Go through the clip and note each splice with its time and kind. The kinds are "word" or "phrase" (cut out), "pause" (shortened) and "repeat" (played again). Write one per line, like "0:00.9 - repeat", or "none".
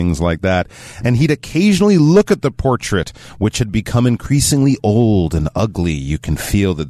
none